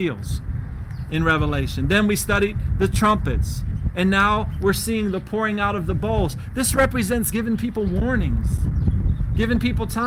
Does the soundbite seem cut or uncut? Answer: cut